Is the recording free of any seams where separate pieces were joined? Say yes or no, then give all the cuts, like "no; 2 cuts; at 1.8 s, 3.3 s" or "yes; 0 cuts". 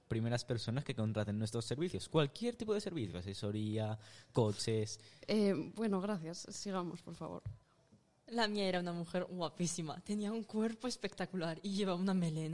yes; 0 cuts